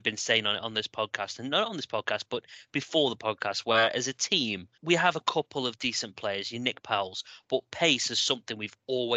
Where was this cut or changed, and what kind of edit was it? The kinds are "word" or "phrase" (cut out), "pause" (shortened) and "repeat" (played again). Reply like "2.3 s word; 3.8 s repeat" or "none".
4.7 s pause